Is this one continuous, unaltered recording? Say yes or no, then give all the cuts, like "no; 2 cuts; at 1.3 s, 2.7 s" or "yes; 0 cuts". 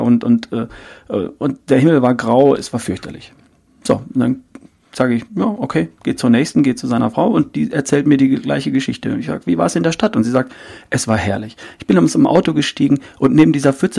yes; 0 cuts